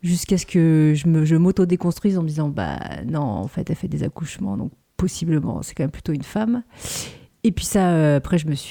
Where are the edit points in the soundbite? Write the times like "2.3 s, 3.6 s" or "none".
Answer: none